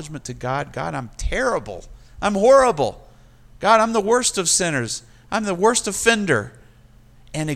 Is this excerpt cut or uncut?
uncut